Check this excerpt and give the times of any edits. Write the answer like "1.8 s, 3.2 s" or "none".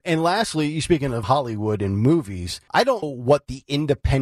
1.2 s, 2.7 s, 3.0 s

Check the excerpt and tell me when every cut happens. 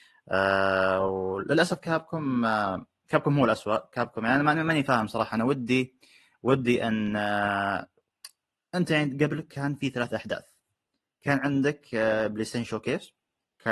none

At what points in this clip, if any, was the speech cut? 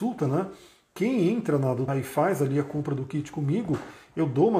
1.9 s

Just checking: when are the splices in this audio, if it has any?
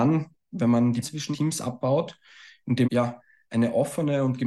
1.0 s, 1.3 s, 2.8 s

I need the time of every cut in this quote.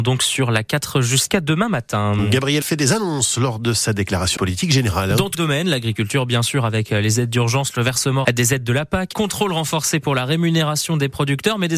2.6 s, 4.4 s, 5.3 s, 8.2 s, 9.1 s

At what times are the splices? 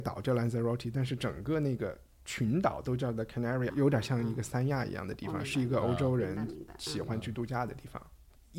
3.7 s

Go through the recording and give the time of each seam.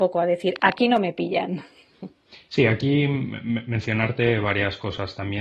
none

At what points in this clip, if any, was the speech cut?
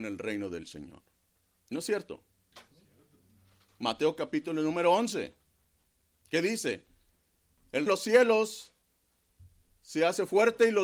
1.2 s, 7.9 s

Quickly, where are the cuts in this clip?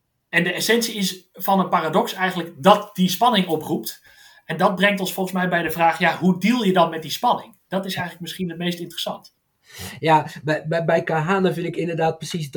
none

